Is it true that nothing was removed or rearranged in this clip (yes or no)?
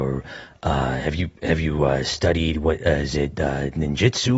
yes